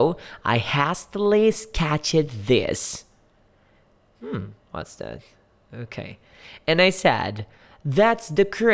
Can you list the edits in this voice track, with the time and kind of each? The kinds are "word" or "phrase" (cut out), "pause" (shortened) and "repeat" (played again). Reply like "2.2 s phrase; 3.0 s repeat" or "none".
none